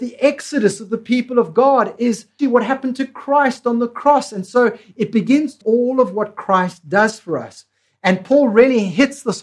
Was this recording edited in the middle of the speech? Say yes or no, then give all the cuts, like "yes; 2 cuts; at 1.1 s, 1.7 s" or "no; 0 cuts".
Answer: yes; 2 cuts; at 2.4 s, 5.6 s